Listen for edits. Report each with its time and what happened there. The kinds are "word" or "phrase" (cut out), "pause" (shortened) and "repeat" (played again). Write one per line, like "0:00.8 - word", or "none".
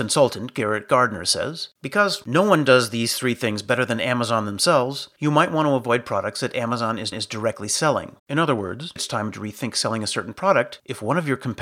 0:01.7 - pause
0:07.1 - repeat
0:08.2 - pause
0:09.0 - word

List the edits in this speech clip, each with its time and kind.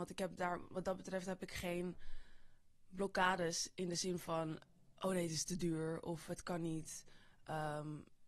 none

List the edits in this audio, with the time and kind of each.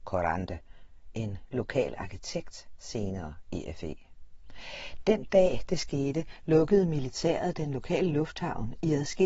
none

